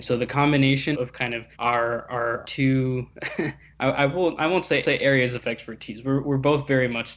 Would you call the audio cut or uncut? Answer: cut